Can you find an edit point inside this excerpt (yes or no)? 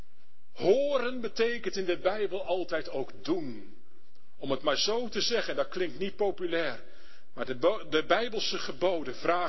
no